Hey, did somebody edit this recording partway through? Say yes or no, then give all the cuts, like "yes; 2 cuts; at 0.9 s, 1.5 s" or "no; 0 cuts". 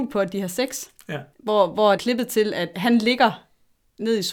yes; 3 cuts; at 1.3 s, 2.0 s, 2.7 s